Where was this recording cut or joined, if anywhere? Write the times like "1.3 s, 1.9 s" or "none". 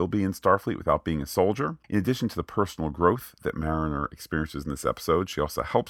1.8 s

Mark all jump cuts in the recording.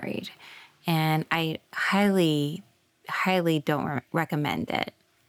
none

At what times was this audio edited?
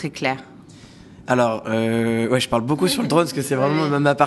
none

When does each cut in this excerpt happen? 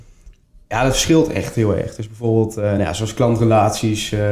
none

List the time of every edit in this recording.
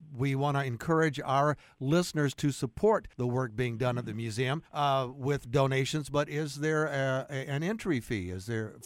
3.1 s, 4.7 s

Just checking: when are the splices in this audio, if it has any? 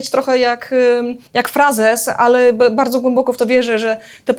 1.3 s

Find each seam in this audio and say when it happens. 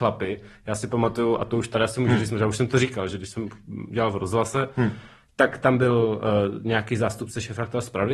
none

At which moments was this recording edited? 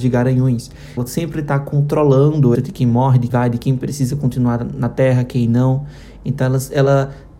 1.0 s, 2.5 s, 3.3 s

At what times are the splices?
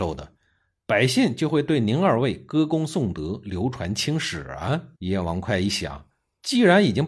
4.9 s

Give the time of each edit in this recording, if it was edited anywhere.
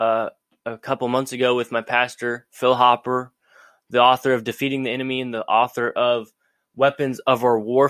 none

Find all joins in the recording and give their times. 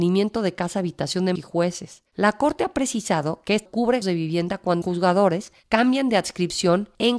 1.4 s, 3.7 s, 4.0 s, 4.8 s

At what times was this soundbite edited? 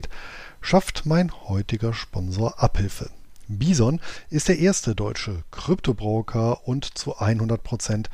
none

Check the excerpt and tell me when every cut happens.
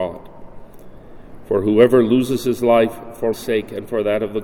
3.3 s

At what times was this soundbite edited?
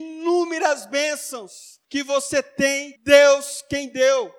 1.8 s, 3.0 s

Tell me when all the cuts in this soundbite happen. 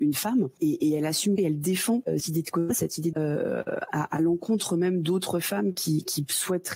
1.4 s, 2.2 s, 3.1 s

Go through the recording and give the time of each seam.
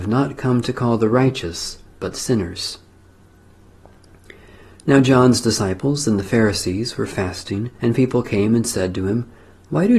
7.7 s

